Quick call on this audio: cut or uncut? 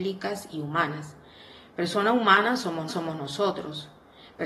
cut